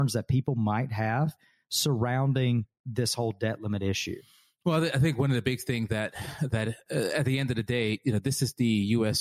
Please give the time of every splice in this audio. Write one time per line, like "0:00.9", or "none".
none